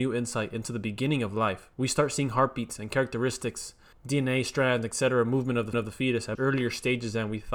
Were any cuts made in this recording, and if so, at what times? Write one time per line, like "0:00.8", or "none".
0:01.7
0:03.9
0:05.7
0:06.3